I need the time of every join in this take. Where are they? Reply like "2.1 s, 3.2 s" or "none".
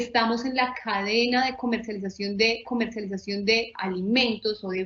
2.6 s

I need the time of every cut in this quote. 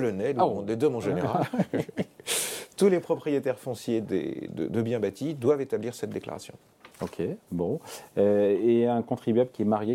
4.5 s, 6.9 s

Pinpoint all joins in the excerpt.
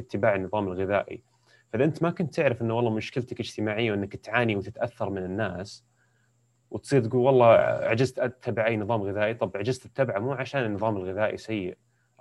none

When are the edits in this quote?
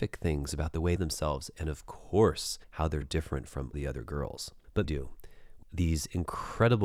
1.0 s, 2.6 s, 3.0 s, 3.7 s, 4.8 s, 5.6 s

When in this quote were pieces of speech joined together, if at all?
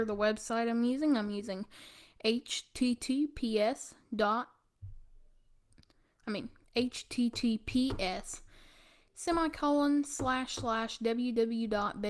none

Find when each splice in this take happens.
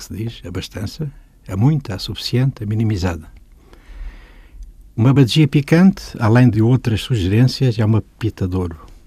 none

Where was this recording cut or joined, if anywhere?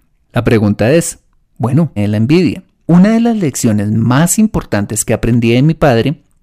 2.0 s

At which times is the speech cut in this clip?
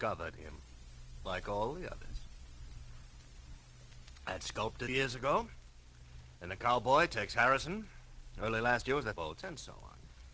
4.9 s, 9.1 s

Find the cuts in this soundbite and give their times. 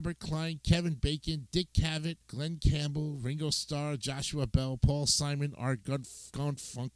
2.2 s

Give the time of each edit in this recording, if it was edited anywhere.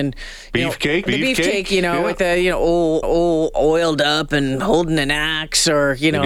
1.1 s, 3.0 s

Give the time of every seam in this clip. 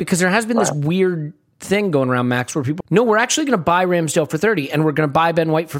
2.8 s

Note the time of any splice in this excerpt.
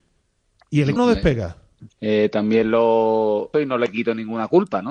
1.0 s, 1.9 s, 3.5 s

